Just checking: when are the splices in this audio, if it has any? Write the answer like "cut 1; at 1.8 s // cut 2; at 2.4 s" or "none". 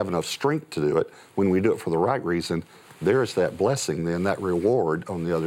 none